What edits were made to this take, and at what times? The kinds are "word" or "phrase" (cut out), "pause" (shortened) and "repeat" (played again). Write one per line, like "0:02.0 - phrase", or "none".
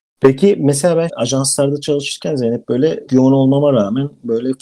0:01.1 - word
0:03.1 - word